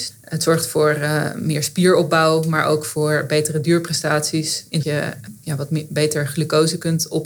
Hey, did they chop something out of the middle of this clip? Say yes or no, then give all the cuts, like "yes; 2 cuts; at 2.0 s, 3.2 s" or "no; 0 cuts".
yes; 1 cut; at 4.8 s